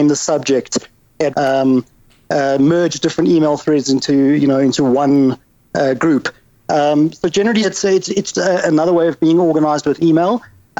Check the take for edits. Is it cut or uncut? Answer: cut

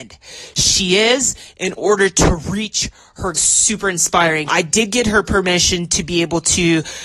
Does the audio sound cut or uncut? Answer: cut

